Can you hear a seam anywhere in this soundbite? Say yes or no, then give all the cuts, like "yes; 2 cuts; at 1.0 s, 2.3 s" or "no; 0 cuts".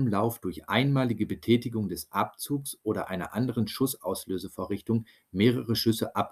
no; 0 cuts